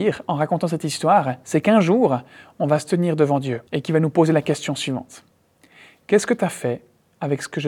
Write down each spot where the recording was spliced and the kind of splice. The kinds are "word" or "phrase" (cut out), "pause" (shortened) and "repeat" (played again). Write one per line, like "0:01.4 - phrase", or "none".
0:03.7 - pause

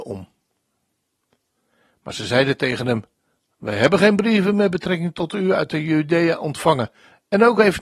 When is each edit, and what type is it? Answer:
none

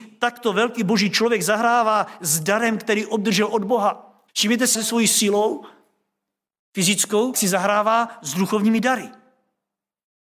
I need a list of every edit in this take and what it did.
0:04.3 - pause
0:04.7 - phrase
0:07.3 - word

